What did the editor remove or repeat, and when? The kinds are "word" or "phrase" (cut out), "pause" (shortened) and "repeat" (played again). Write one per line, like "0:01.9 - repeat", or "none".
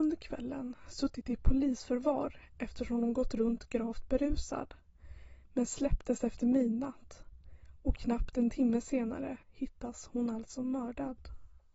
0:09.4 - pause